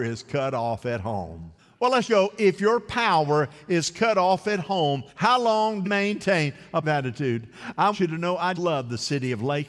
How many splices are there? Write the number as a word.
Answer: seven